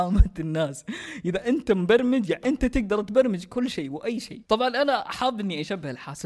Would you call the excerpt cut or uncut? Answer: cut